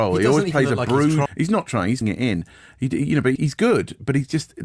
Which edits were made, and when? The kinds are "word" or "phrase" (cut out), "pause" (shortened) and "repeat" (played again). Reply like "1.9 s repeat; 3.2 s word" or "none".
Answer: 1.3 s word; 2.0 s word; 3.4 s word